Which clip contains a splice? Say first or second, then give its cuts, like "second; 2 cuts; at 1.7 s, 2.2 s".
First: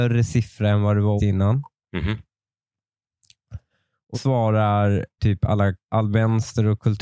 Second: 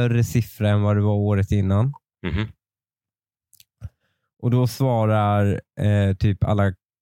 first; 4 cuts; at 1.2 s, 4.1 s, 5.2 s, 5.9 s